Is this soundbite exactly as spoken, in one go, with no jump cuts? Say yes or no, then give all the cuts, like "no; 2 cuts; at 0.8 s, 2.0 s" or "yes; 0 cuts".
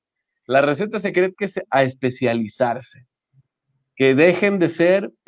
no; 2 cuts; at 1.3 s, 1.6 s